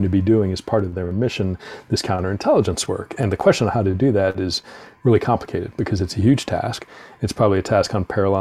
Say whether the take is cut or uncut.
uncut